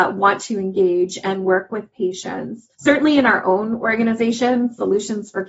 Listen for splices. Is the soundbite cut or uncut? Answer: cut